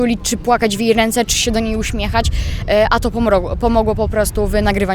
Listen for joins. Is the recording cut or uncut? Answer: uncut